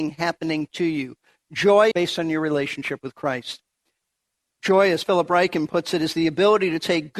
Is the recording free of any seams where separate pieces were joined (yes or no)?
no